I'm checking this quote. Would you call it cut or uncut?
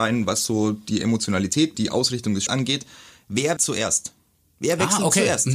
cut